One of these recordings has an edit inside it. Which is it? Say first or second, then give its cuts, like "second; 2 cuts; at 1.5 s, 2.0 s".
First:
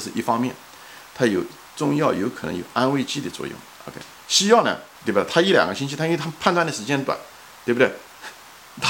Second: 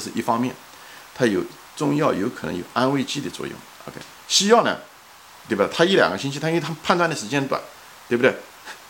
first; 1 cut; at 4.9 s